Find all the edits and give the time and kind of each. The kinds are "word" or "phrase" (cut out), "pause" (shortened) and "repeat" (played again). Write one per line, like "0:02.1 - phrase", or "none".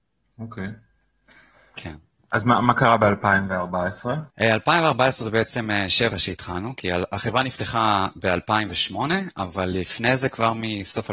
0:04.3 - pause
0:06.1 - phrase